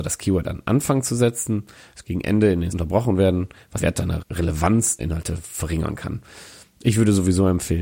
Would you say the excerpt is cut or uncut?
cut